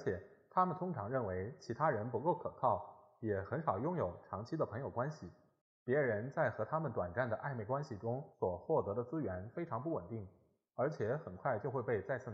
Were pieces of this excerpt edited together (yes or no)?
yes